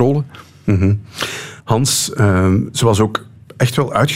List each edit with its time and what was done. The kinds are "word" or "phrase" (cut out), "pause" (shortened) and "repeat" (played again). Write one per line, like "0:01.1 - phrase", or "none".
0:01.6 - pause